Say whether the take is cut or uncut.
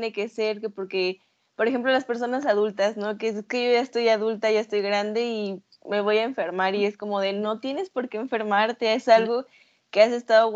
uncut